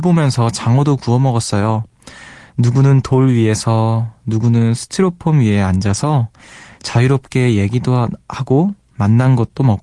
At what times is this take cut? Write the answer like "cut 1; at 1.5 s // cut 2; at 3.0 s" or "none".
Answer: none

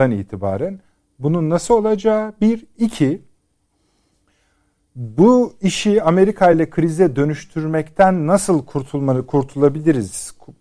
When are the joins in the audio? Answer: none

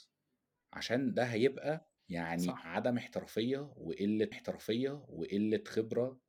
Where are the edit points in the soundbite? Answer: cut 1; at 2.0 s // cut 2; at 4.3 s

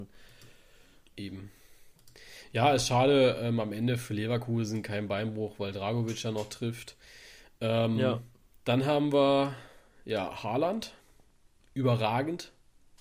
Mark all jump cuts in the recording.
none

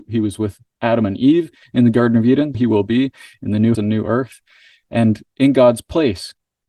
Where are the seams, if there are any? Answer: cut 1; at 2.5 s // cut 2; at 3.7 s

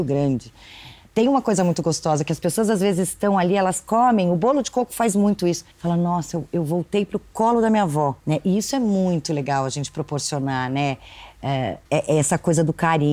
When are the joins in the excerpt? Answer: cut 1; at 5.7 s // cut 2; at 8.2 s // cut 3; at 11.9 s

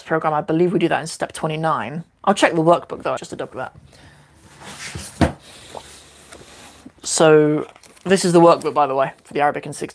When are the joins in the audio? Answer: cut 1; at 3.2 s // cut 2; at 3.5 s // cut 3; at 7.8 s

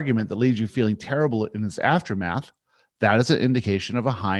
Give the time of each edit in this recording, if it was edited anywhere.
none

